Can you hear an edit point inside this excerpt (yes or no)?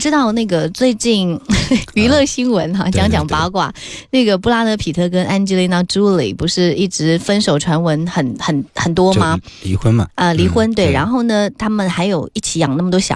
no